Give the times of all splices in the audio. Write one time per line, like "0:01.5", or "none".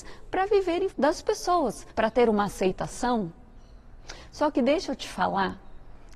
0:00.9
0:01.9